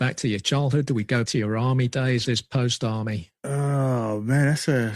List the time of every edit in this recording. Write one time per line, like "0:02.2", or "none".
0:01.3
0:02.2